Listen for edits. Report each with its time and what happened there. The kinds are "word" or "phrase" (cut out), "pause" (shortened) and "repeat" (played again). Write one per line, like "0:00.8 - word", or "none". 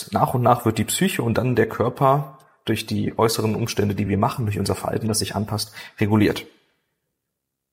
none